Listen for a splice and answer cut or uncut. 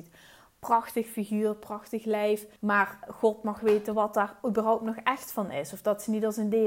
cut